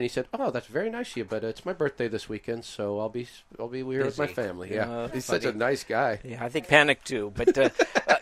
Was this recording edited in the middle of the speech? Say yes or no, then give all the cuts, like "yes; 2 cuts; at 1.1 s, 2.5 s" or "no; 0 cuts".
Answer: yes; 2 cuts; at 5.1 s, 6.6 s